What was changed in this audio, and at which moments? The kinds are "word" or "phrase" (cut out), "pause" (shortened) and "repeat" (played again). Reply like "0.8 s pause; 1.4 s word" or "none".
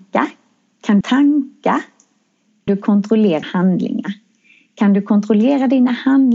1.0 s phrase; 2.7 s word; 3.4 s word